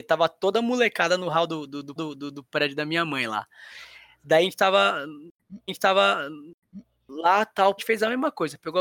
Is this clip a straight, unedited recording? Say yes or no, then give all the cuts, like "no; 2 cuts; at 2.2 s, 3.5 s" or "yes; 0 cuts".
no; 3 cuts; at 2.0 s, 5.7 s, 7.8 s